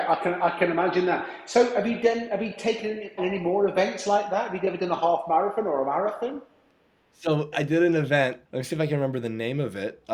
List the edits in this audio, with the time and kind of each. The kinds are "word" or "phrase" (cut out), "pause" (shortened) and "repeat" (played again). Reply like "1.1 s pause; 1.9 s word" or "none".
3.2 s word; 7.5 s word; 8.4 s pause